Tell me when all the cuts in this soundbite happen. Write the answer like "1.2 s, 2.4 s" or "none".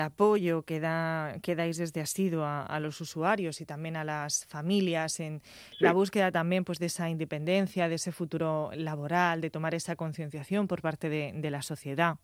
none